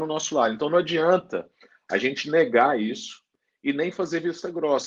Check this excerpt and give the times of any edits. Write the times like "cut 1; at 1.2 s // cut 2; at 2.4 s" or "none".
none